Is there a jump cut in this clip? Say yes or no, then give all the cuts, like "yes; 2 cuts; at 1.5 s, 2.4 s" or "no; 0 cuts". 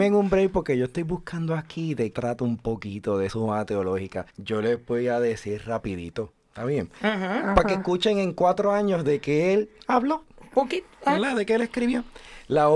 yes; 3 cuts; at 2.1 s, 3.3 s, 4.3 s